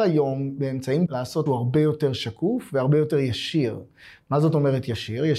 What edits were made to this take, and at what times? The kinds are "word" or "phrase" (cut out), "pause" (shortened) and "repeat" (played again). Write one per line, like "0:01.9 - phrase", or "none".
0:01.1 - word
0:01.5 - word